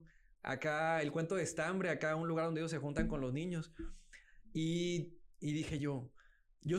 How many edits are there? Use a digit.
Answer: 0